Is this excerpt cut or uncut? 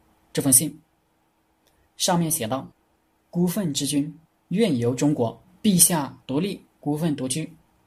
cut